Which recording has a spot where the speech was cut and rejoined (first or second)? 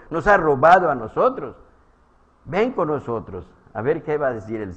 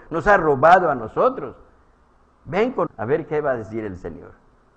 second